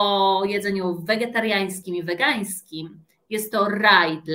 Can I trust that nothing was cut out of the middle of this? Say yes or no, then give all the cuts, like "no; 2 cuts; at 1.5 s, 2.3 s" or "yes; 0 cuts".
yes; 0 cuts